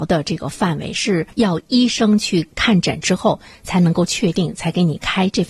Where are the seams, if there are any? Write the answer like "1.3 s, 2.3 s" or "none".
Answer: 1.3 s